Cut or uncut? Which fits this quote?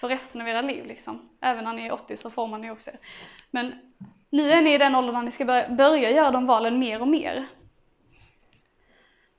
uncut